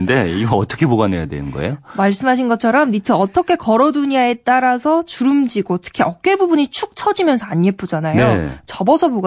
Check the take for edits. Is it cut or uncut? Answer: uncut